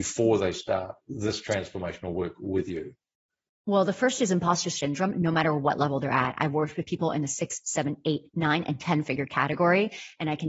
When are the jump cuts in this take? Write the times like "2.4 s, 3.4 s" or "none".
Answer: none